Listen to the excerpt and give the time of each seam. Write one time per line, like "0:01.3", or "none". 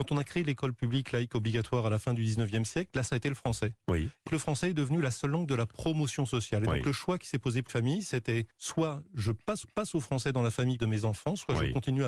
0:03.1
0:04.3
0:07.7
0:08.5
0:09.6
0:10.8